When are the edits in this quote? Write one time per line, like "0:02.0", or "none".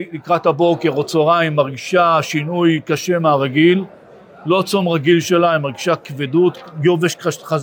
none